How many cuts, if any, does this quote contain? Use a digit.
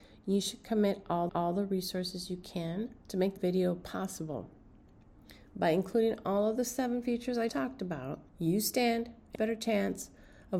6